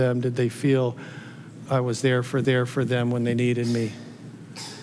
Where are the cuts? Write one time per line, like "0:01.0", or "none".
0:01.7
0:02.4